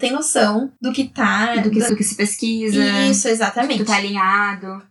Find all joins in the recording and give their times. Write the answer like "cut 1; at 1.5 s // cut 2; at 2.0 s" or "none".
cut 1; at 1.9 s